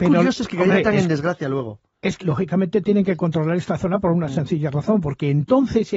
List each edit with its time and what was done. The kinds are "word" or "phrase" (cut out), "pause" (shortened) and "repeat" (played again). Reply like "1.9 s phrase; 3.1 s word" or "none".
2.2 s word

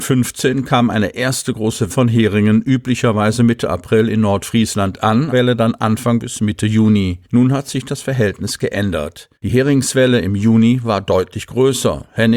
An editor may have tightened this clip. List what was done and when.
1.9 s word; 5.3 s phrase; 7.2 s pause; 9.4 s pause

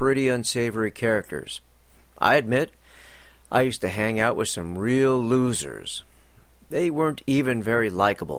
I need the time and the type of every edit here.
none

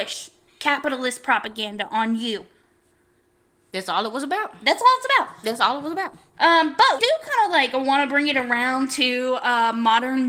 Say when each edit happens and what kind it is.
7.0 s word

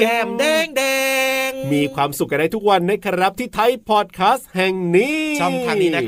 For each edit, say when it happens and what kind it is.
3.8 s word

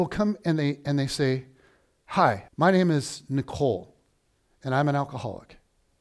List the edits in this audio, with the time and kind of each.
2.5 s pause

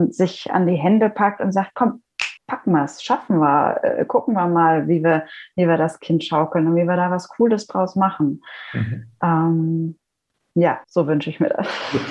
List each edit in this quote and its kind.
2.4 s pause; 10.8 s pause

